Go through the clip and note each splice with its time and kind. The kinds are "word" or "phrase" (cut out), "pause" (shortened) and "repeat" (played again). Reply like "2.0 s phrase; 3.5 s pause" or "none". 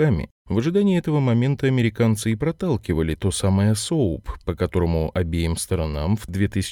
none